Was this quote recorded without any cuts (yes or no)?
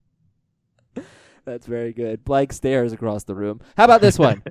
yes